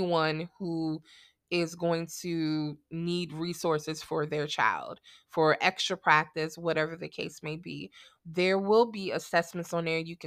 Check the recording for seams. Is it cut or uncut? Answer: uncut